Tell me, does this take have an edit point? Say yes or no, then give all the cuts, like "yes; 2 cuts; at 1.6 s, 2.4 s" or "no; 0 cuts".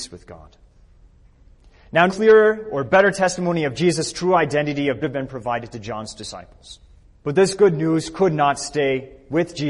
yes; 3 cuts; at 2.1 s, 5.0 s, 7.0 s